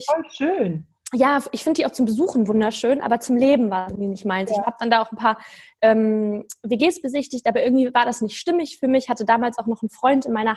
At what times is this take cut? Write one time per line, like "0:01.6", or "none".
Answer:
none